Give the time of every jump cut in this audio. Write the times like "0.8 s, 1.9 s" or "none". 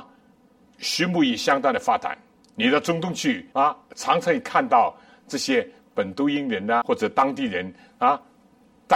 2.3 s, 3.5 s, 6.8 s